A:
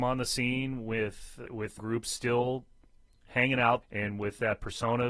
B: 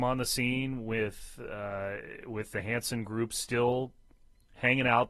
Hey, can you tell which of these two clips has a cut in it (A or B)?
A